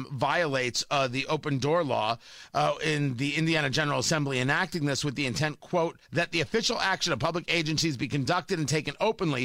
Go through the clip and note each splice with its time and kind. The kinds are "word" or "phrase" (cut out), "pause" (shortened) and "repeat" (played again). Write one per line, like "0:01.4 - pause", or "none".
0:06.0 - pause